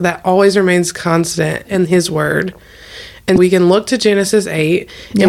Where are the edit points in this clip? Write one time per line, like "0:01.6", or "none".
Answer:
0:01.6
0:03.4